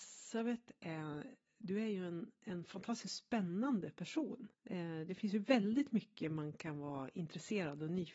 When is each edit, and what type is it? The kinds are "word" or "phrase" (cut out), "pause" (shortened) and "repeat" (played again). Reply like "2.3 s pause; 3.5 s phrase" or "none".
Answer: 4.5 s pause